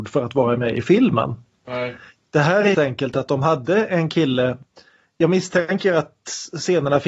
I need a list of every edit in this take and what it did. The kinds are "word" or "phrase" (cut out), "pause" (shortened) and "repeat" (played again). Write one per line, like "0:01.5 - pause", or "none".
0:02.7 - word